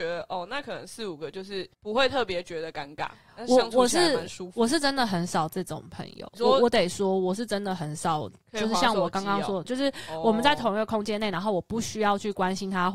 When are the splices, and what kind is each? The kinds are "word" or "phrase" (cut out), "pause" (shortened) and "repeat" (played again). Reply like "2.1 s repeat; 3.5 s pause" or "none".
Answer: 1.7 s pause; 6.3 s pause; 9.6 s word